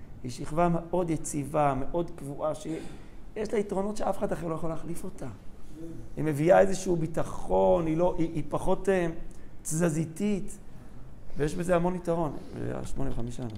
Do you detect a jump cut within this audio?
no; 0 cuts

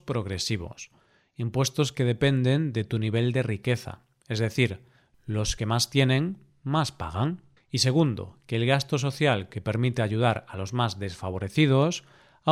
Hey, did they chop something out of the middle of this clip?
no; 0 cuts

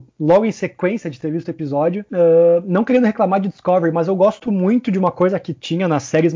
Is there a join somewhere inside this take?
no; 0 cuts

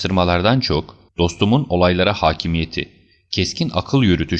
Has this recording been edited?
yes; 1 cut; at 1.1 s

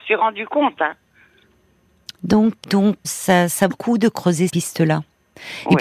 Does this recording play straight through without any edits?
no; 4 cuts; at 2.6 s, 3.0 s, 3.7 s, 4.5 s

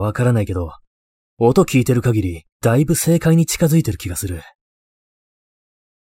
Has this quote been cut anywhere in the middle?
yes; 1 cut; at 2.5 s

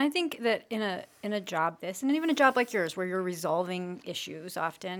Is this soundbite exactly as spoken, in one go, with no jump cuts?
no; 1 cut; at 1.8 s

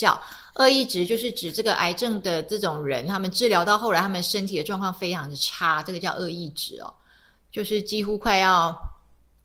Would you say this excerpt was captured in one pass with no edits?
yes; 0 cuts

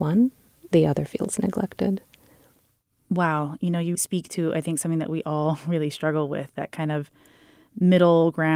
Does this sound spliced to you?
yes; 1 cut; at 3.9 s

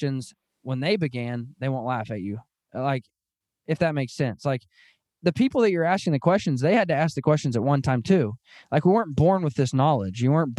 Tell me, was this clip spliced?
no; 0 cuts

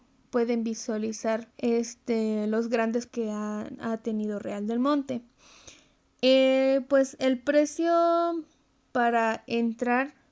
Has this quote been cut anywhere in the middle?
yes; 3 cuts; at 1.5 s, 3.1 s, 6.9 s

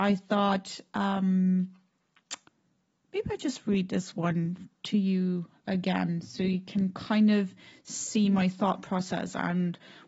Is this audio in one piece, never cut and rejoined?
yes; 0 cuts

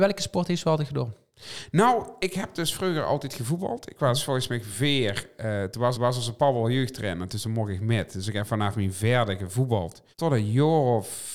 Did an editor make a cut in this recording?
yes; 2 cuts; at 5.9 s, 10.1 s

